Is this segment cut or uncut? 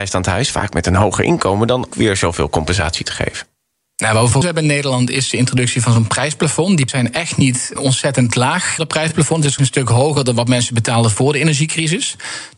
cut